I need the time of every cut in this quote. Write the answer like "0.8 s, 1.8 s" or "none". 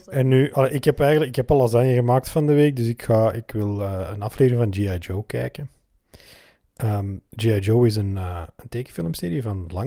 7.3 s